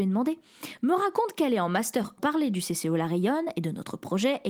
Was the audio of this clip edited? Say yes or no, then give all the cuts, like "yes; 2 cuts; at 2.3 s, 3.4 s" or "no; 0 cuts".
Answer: yes; 1 cut; at 2.2 s